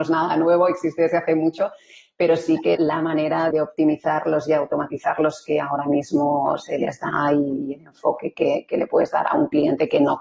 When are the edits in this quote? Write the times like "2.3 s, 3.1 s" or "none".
2.8 s, 3.5 s